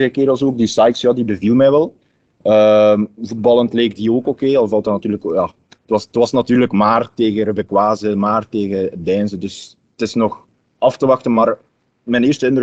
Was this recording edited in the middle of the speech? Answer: no; 0 cuts

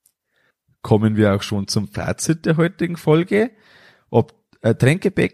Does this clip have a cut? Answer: no; 0 cuts

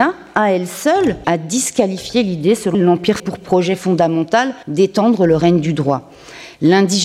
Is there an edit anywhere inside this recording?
yes; 4 cuts; at 1.2 s, 2.7 s, 3.2 s, 4.6 s

